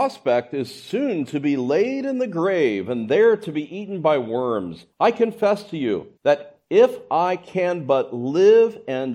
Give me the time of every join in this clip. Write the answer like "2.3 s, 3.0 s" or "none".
4.9 s, 6.2 s